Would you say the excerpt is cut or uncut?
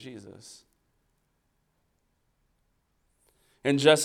uncut